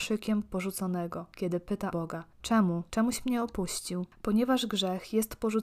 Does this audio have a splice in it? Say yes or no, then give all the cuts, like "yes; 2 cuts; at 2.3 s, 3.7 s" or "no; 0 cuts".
yes; 2 cuts; at 1.9 s, 2.3 s